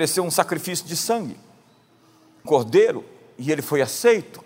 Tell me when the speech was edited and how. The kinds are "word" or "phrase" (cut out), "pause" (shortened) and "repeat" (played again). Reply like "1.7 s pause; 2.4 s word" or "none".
2.4 s word